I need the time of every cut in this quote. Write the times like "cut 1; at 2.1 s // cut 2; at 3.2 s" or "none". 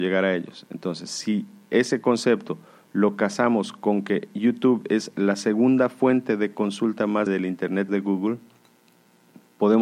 cut 1; at 7.3 s // cut 2; at 7.9 s